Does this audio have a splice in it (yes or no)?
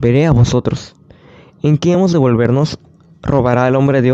no